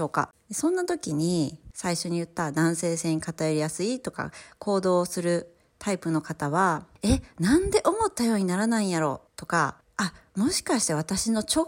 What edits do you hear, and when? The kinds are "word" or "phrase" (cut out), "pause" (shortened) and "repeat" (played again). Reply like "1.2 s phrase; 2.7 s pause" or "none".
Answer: 9.3 s pause